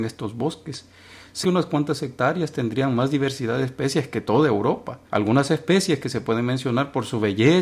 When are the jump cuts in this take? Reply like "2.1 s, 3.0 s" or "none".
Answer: 1.4 s, 5.1 s